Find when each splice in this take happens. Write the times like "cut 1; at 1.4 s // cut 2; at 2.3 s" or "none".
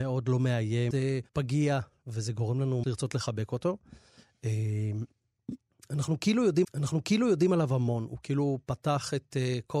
cut 1; at 0.9 s // cut 2; at 1.3 s // cut 3; at 2.8 s // cut 4; at 6.6 s